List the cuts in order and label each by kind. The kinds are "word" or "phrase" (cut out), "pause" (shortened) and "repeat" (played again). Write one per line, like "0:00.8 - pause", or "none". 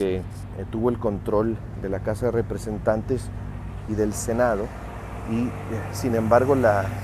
none